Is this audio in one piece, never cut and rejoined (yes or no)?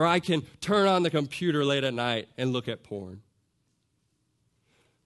yes